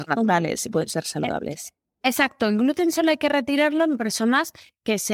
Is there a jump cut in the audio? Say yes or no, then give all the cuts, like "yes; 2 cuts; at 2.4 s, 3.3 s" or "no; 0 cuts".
no; 0 cuts